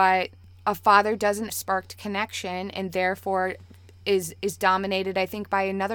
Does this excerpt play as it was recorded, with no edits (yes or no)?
no